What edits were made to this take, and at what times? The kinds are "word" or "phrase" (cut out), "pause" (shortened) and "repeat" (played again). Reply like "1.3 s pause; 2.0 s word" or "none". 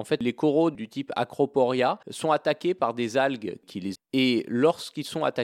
2.0 s pause; 3.9 s word